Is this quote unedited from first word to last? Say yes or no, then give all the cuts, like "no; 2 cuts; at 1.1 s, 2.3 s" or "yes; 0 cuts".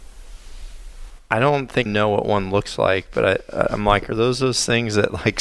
no; 1 cut; at 1.9 s